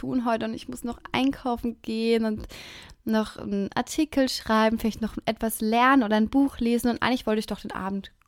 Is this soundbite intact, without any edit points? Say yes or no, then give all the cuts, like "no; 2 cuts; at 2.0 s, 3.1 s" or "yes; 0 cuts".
yes; 0 cuts